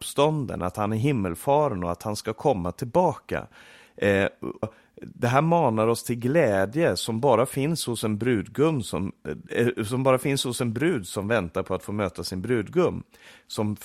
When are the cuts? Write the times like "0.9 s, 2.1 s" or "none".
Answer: 4.6 s